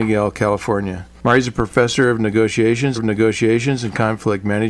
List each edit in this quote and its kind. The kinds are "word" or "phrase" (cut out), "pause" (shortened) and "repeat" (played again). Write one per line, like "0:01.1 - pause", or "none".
0:03.0 - repeat